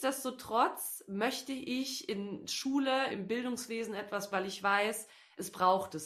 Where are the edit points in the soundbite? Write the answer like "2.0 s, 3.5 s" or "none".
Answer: 3.1 s, 4.3 s